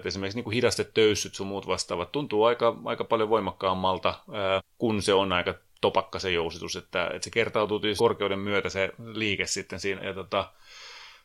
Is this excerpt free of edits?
no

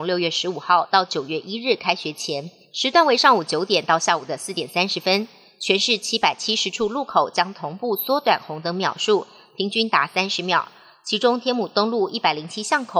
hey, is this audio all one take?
yes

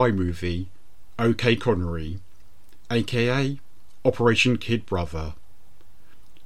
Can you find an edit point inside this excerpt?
no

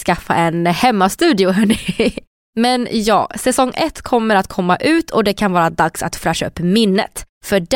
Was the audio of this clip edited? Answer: no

